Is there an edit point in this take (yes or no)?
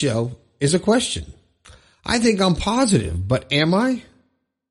no